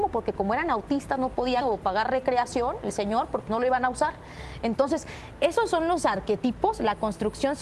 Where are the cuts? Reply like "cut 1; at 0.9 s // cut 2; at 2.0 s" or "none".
cut 1; at 1.6 s // cut 2; at 3.5 s